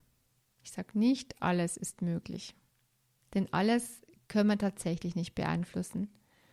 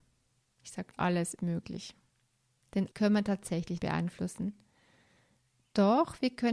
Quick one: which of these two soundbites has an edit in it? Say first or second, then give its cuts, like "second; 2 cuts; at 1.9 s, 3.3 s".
second; 4 cuts; at 0.9 s, 1.4 s, 2.9 s, 3.8 s